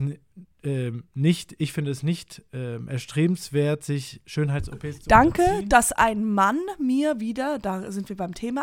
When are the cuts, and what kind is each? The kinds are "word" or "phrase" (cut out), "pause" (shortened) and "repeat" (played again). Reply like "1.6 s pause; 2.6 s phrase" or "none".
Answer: none